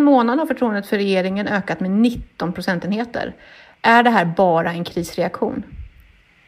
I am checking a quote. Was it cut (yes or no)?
no